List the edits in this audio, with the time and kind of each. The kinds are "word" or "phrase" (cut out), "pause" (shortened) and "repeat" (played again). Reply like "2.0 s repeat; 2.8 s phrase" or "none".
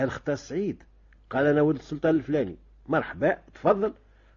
none